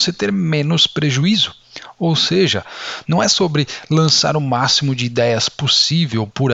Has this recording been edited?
no; 0 cuts

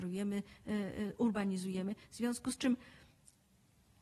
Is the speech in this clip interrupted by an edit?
no; 0 cuts

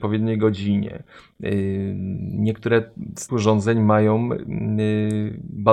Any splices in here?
yes; 1 cut; at 3.3 s

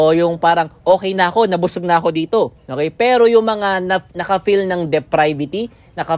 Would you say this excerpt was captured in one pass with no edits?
no; 2 cuts; at 2.6 s, 4.1 s

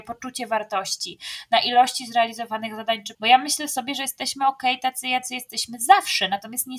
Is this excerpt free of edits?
no; 1 cut; at 3.1 s

